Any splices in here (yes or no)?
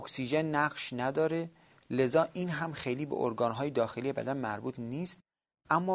no